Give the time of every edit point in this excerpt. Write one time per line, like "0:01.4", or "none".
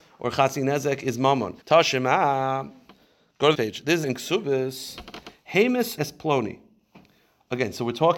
0:01.6
0:03.5
0:04.0
0:06.0

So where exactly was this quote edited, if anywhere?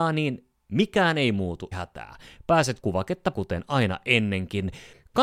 0:01.7
0:02.8
0:03.3

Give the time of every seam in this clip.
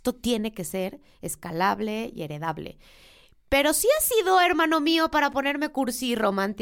none

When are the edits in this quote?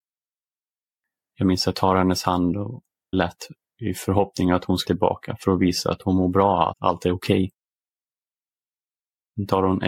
0:01.7
0:03.1
0:04.8
0:06.7

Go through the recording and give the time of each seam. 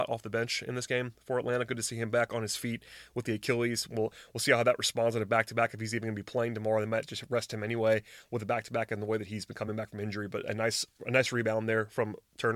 none

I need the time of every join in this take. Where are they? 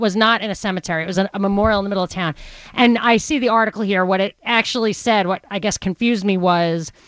none

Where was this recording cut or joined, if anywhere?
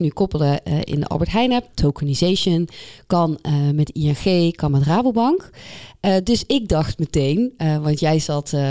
none

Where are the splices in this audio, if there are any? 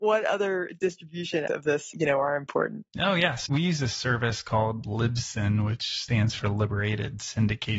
0:01.5
0:01.9
0:02.9
0:03.5

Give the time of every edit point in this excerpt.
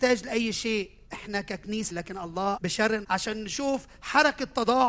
0:01.1
0:01.9
0:02.6
0:03.0

